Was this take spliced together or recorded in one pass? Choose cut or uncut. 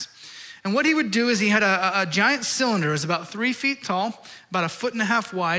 uncut